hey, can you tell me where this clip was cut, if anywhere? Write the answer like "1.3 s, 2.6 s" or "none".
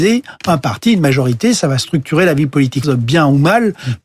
2.8 s